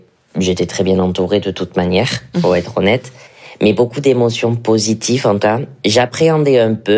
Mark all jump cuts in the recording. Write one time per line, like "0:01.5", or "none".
0:02.3
0:05.4